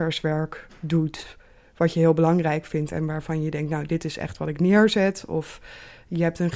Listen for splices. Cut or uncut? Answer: uncut